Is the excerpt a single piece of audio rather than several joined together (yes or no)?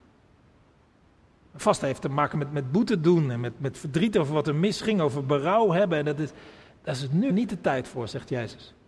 no